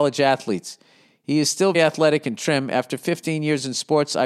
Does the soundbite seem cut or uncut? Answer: cut